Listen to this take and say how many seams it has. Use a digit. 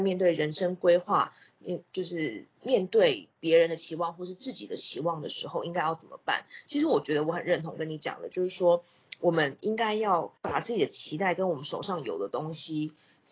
1